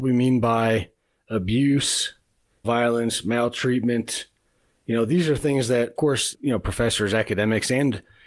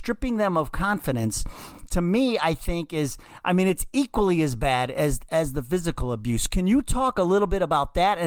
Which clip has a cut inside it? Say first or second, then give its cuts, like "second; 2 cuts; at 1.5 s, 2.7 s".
first; 3 cuts; at 2.6 s, 6.0 s, 6.3 s